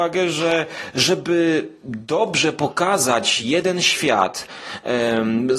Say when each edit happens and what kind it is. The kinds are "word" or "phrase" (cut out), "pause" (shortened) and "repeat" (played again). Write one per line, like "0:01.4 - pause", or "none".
none